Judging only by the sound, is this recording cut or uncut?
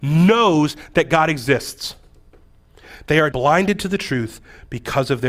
cut